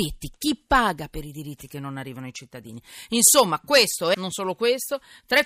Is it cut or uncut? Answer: cut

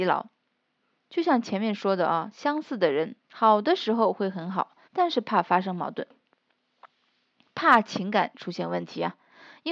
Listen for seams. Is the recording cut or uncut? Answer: cut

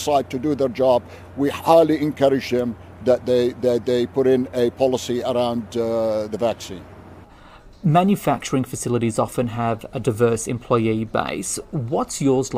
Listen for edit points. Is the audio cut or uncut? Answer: uncut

